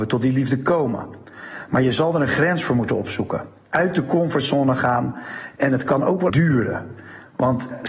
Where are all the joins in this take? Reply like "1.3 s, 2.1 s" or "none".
6.3 s